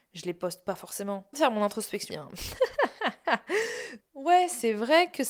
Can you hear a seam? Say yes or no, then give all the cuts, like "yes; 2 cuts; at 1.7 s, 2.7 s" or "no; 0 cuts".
yes; 3 cuts; at 1.3 s, 2.1 s, 4.0 s